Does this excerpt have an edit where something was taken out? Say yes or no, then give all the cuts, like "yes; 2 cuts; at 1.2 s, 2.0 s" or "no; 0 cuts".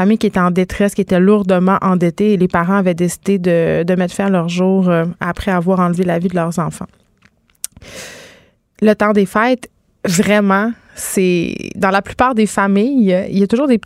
no; 0 cuts